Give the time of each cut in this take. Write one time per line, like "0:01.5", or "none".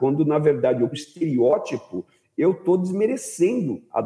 0:00.9